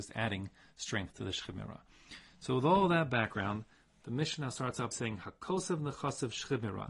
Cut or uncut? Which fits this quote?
cut